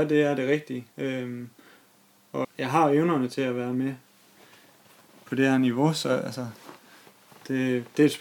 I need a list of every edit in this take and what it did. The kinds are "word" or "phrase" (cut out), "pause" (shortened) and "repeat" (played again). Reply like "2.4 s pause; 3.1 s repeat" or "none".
0.9 s pause; 2.4 s word